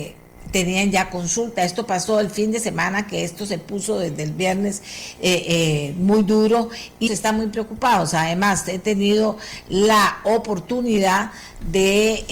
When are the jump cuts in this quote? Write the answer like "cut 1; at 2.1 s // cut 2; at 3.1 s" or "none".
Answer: cut 1; at 7.1 s